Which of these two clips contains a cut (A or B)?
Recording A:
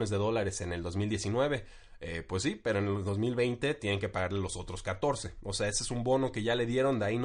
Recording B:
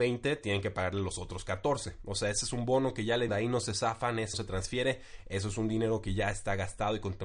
B